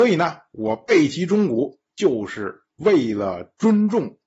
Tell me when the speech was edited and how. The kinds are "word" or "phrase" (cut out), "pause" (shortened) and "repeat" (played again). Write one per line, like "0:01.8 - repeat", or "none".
0:01.9 - pause
0:02.7 - pause